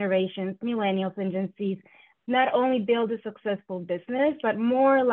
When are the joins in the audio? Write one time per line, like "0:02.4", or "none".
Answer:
none

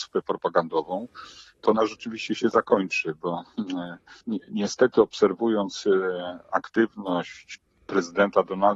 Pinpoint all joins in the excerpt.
0:04.2

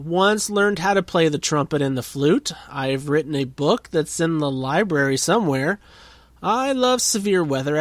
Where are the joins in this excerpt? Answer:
none

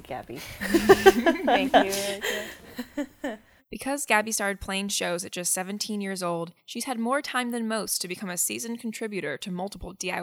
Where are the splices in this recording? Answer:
0:03.6
0:06.6

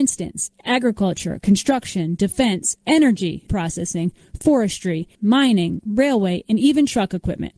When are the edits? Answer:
0:02.8
0:03.5
0:05.1

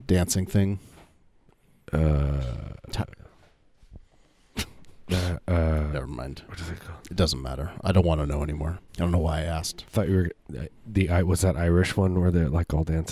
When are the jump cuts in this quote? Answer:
0:08.9

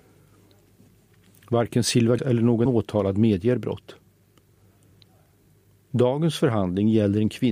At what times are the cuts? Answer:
0:02.2
0:02.7

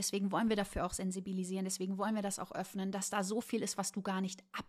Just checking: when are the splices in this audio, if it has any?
none

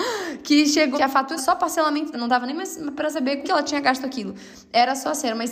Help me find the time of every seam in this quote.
0:00.9
0:01.4
0:02.1
0:03.4

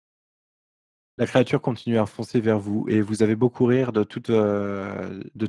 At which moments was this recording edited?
none

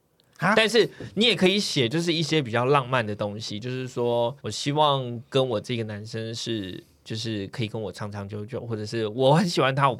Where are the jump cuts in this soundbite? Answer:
0:04.4

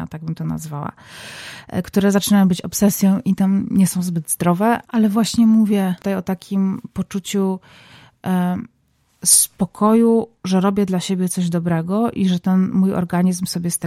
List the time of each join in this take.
none

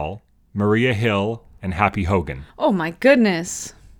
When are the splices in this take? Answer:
0:02.5

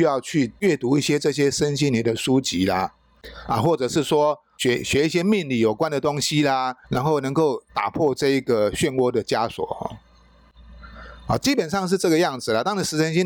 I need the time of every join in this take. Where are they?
0:06.8
0:07.7

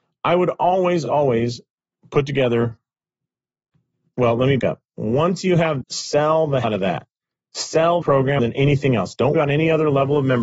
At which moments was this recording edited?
0:01.1
0:04.6
0:05.8
0:06.6
0:08.0
0:08.4
0:09.3

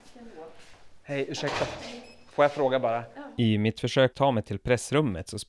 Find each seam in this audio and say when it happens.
0:04.1

